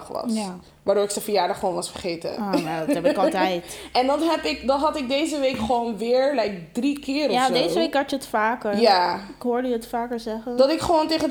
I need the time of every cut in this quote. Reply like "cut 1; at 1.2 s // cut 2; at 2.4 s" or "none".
none